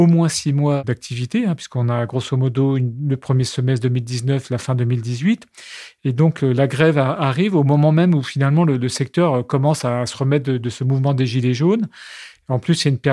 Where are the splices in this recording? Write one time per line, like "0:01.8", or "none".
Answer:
none